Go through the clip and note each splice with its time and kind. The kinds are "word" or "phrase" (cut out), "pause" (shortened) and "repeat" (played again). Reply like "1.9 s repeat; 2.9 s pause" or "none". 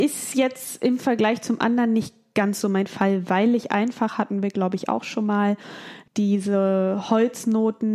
6.1 s pause